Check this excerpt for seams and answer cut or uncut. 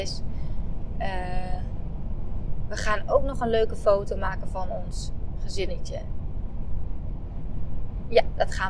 uncut